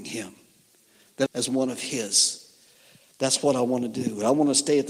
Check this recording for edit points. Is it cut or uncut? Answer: cut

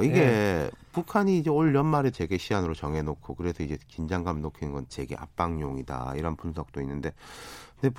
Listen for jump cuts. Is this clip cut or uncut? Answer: cut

